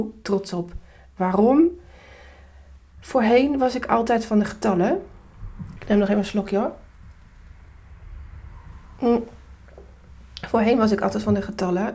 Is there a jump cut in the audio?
no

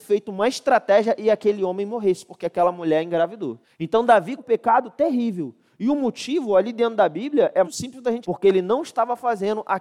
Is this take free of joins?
no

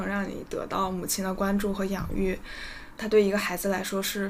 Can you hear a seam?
yes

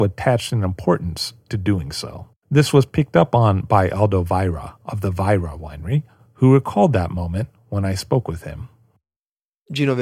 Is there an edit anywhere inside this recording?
yes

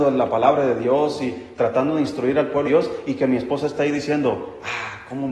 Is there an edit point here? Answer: yes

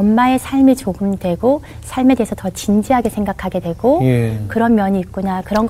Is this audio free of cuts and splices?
no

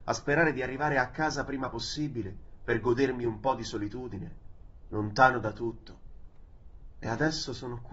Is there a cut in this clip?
no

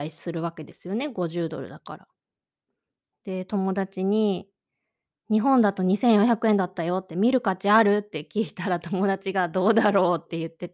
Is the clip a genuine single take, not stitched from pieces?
yes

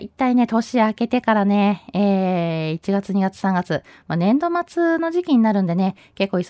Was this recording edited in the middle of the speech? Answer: no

